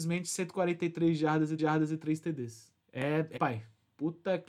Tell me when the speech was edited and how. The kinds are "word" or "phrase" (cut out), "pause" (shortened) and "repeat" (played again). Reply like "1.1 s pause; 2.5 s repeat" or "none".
1.6 s repeat; 2.8 s pause; 3.4 s word

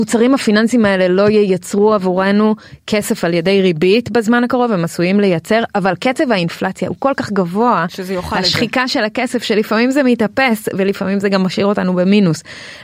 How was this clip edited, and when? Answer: none

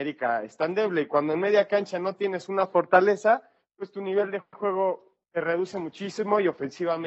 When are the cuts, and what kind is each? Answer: 5.2 s pause

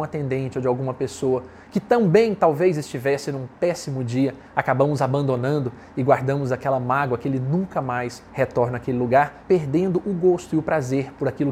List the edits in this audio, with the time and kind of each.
4.5 s pause; 8.3 s pause; 9.4 s pause

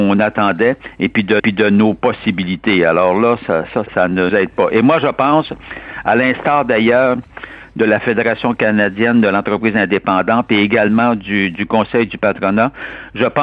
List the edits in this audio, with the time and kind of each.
1.4 s repeat; 3.9 s word; 4.3 s word

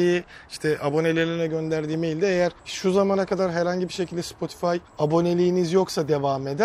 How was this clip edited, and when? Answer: 2.6 s pause; 4.9 s pause

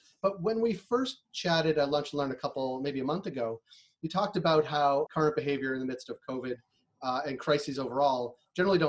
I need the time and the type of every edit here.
5.1 s word

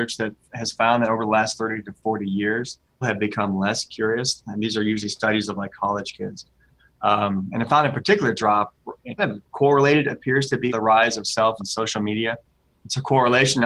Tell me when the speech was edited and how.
3.0 s word; 9.2 s word; 10.7 s word; 11.6 s word

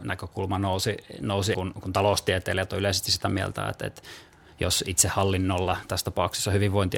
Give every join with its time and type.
1.5 s word

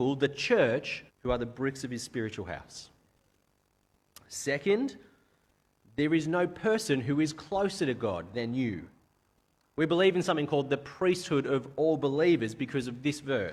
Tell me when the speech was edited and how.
1.1 s pause

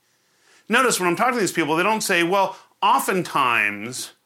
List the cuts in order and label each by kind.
none

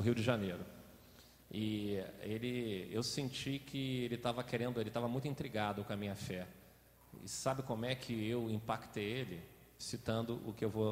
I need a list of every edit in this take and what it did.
none

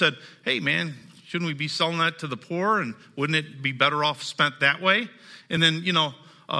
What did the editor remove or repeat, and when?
none

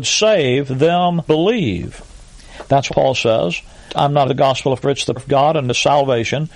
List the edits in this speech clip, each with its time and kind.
1.3 s word; 2.9 s word; 3.9 s word; 4.2 s word; 4.8 s word; 5.2 s word

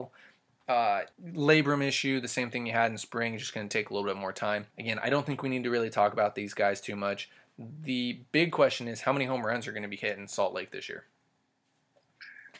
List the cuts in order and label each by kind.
1.1 s pause; 4.7 s pause

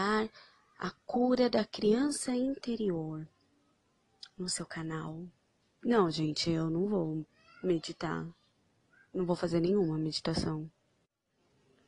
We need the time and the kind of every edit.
none

